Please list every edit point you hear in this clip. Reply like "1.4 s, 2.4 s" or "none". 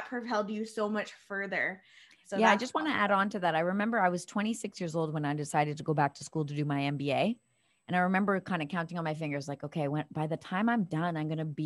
none